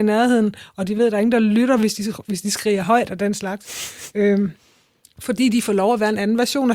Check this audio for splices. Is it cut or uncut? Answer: uncut